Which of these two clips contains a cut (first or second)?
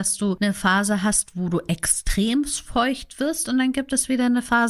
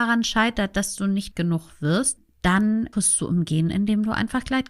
second